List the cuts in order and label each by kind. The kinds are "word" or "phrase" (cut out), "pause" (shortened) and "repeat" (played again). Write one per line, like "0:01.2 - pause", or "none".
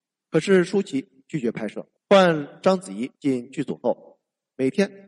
0:02.0 - pause
0:03.1 - pause